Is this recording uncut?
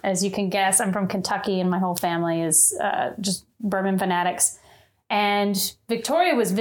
yes; 0 cuts

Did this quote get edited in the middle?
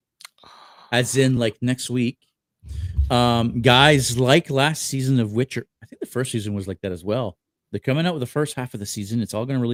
no; 0 cuts

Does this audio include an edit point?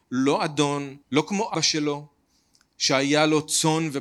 yes; 2 cuts; at 1.0 s, 1.5 s

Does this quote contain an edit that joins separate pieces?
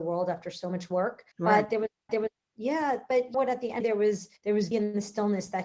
yes; 6 cuts; at 1.3 s, 2.1 s, 3.3 s, 3.8 s, 4.4 s, 4.7 s

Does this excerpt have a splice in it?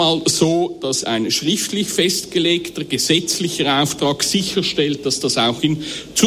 yes; 1 cut; at 1.0 s

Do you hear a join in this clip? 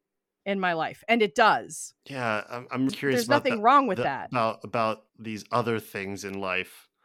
yes; 3 cuts; at 2.0 s, 2.9 s, 5.1 s

